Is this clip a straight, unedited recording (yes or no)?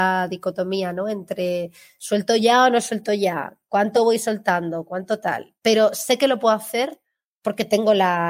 yes